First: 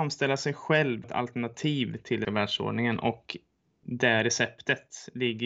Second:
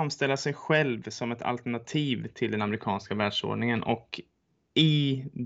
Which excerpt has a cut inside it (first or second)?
first